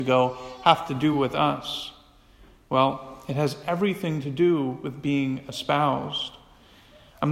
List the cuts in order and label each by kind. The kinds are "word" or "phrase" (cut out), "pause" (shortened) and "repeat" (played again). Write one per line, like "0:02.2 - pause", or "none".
none